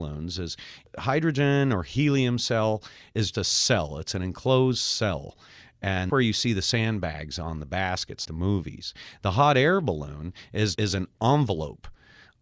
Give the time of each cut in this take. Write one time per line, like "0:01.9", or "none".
0:03.3
0:06.1
0:08.3
0:10.8